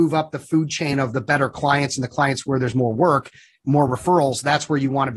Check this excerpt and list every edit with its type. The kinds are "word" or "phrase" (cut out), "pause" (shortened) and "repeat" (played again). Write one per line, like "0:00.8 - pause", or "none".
none

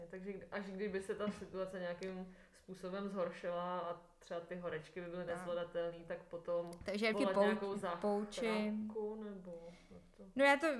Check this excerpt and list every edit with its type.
0:07.1 - word

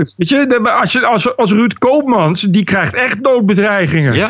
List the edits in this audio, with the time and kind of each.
none

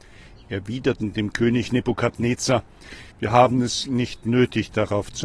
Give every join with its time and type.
0:03.1 - pause

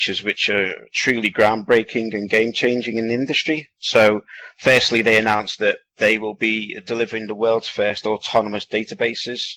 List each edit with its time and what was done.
0:05.9 - pause

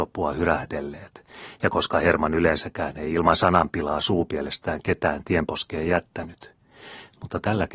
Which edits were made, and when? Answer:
none

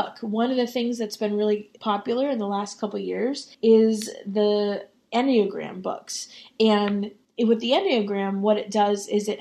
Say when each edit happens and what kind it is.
0:01.8 - word
0:03.5 - pause
0:07.2 - pause

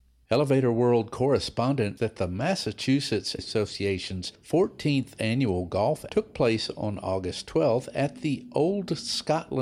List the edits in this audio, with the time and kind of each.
0:02.0 - phrase
0:03.4 - phrase
0:06.1 - word

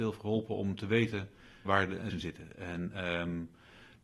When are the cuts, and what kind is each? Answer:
0:01.6 - word
0:02.1 - word

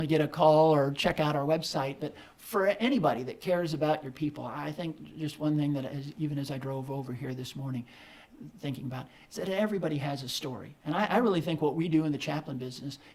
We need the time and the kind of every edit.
none

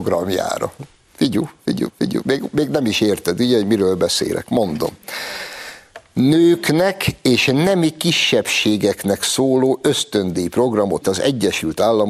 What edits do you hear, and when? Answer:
0:01.9 - repeat
0:11.0 - word

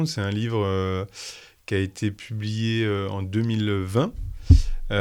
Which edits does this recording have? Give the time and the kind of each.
none

